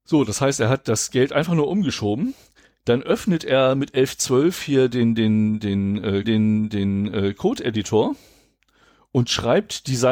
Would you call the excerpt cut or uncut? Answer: cut